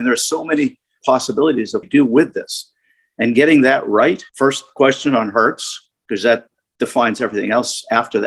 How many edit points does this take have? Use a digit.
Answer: 3